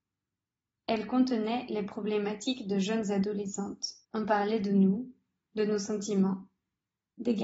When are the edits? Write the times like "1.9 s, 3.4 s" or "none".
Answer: 4.0 s